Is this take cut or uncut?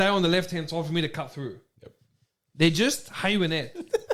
uncut